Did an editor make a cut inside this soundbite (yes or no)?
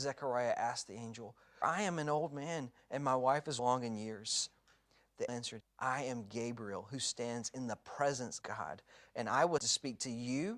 yes